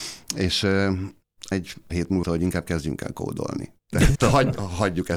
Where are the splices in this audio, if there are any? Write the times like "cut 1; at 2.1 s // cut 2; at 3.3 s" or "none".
cut 1; at 1.5 s // cut 2; at 1.9 s // cut 3; at 2.2 s // cut 4; at 4.1 s